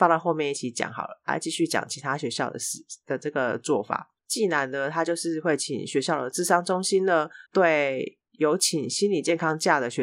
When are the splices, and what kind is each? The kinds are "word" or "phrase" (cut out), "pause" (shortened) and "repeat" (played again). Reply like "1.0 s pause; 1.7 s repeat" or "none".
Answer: 4.2 s pause; 7.5 s pause